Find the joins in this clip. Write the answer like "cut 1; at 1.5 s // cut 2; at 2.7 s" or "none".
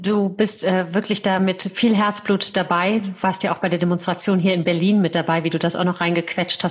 none